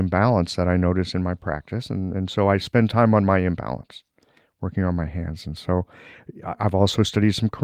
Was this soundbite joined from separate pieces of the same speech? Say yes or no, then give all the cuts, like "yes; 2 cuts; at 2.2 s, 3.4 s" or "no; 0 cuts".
no; 0 cuts